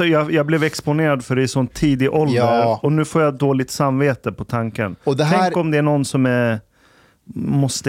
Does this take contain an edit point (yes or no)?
no